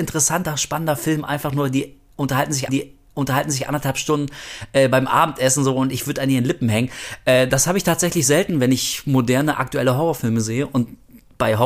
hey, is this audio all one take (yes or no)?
no